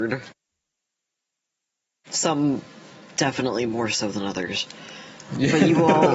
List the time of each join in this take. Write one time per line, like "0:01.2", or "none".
none

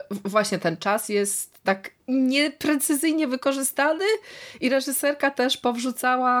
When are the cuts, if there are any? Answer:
0:02.0

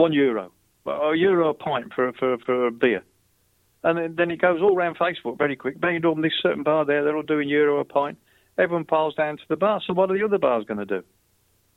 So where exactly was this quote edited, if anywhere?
none

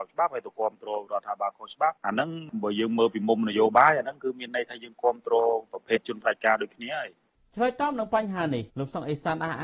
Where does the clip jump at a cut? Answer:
0:05.7
0:08.7

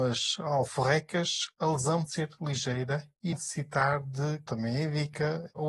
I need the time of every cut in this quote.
0:02.1
0:03.3
0:04.5

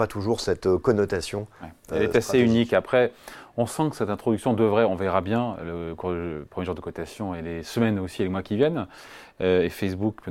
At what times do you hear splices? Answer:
none

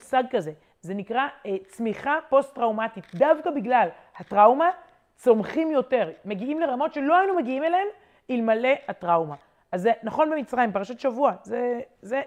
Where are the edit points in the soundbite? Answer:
none

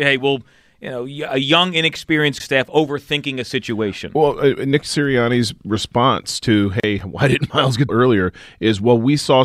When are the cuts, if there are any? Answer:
0:02.4
0:07.9

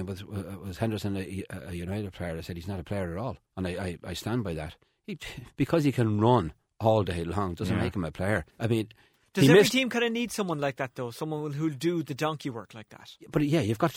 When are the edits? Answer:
0:03.4
0:05.5
0:08.5

